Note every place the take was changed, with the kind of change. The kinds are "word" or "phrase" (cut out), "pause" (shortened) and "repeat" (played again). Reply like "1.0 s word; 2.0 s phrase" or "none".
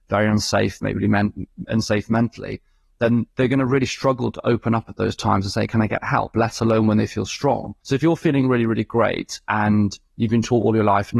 3.3 s pause; 7.8 s pause; 9.4 s pause